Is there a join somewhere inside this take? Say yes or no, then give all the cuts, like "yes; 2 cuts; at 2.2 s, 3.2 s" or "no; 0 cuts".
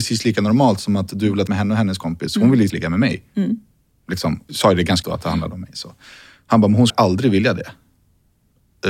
yes; 5 cuts; at 1.5 s, 2.7 s, 4.5 s, 5.0 s, 6.9 s